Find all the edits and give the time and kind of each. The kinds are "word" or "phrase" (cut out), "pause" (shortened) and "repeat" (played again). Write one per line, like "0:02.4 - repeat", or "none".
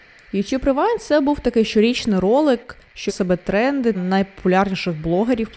0:03.1 - word
0:03.9 - word